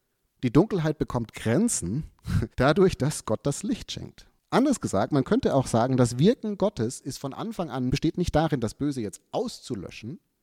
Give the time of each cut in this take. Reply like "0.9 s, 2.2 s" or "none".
2.5 s, 4.4 s, 7.9 s